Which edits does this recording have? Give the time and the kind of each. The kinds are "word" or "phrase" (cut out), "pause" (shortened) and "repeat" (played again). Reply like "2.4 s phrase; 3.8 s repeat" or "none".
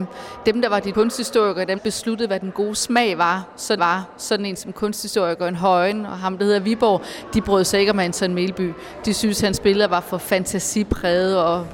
0.9 s word; 1.8 s word; 3.8 s repeat